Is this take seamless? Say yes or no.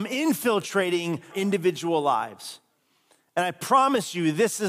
no